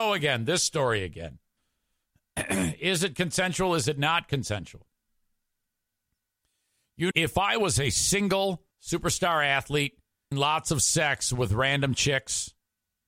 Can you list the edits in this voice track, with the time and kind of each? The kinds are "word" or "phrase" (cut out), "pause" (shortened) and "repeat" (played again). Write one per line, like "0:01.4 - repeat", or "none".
0:01.6 - pause
0:07.1 - word
0:08.7 - pause
0:10.3 - word